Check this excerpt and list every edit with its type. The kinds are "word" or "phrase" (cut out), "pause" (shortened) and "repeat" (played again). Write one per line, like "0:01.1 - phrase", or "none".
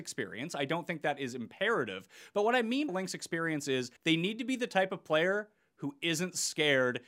0:02.9 - word
0:04.0 - pause